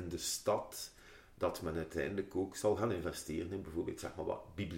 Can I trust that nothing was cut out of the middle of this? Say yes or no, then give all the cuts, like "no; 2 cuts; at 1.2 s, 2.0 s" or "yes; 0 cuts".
yes; 0 cuts